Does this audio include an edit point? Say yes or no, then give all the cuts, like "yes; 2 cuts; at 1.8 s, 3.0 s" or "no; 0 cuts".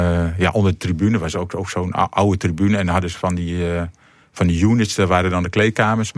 no; 0 cuts